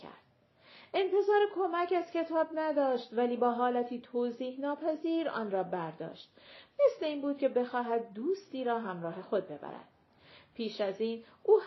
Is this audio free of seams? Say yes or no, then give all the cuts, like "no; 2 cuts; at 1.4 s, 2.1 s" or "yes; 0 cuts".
yes; 0 cuts